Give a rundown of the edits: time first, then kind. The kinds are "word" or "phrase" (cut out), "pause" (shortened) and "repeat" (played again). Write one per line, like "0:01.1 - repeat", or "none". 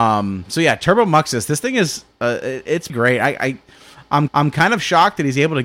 0:02.9 - word
0:04.3 - repeat

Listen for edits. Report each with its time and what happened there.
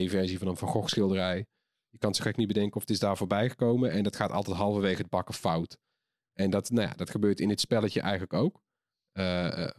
none

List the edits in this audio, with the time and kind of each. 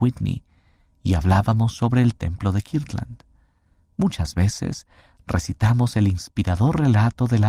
none

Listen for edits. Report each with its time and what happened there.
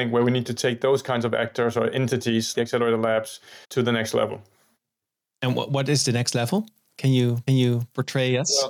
0:02.5 - word
0:03.6 - pause
0:07.5 - repeat

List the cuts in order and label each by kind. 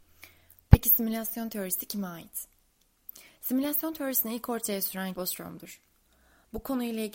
0:05.1 - phrase

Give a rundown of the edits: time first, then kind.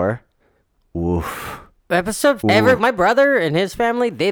0:02.4 - word
0:02.8 - word

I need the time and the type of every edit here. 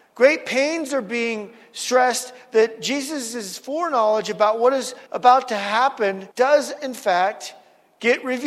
0:05.1 - pause
0:06.3 - pause

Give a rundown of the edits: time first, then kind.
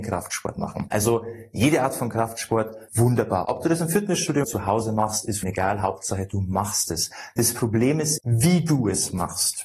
0:02.9 - pause
0:04.4 - phrase
0:05.4 - word
0:08.2 - word

